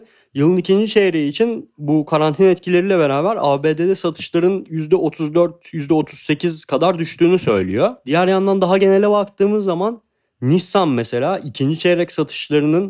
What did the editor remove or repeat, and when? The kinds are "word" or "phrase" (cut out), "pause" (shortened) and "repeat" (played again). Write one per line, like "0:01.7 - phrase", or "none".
none

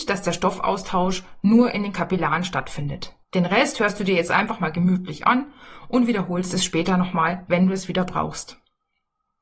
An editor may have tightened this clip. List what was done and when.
0:03.2 - pause

